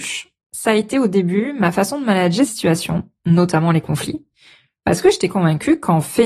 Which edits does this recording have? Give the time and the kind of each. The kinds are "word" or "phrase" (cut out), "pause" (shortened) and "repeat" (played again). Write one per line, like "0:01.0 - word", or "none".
0:02.5 - word